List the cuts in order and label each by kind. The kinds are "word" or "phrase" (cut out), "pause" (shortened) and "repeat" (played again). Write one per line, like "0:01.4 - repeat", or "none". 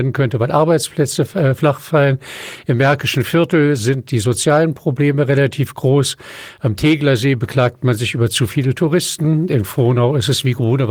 none